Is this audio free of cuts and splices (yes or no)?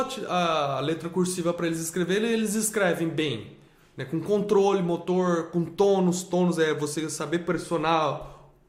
yes